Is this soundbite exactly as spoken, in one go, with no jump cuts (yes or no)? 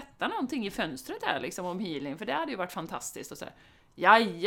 yes